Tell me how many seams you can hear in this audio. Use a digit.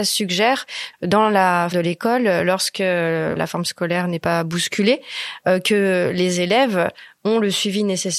3